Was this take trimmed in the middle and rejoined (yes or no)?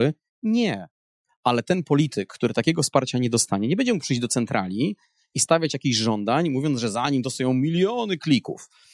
no